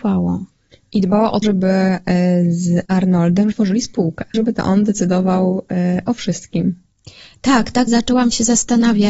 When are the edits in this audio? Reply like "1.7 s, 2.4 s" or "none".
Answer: 1.4 s, 2.8 s, 3.5 s, 4.3 s, 7.9 s